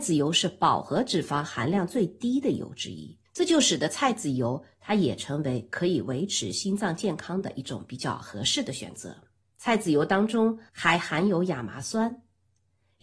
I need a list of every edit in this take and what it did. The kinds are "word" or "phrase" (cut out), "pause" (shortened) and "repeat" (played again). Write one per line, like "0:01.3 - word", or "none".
0:03.2 - pause
0:09.4 - pause